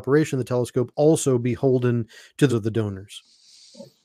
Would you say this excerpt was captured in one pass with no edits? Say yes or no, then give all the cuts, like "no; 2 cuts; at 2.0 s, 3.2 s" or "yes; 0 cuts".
no; 1 cut; at 2.5 s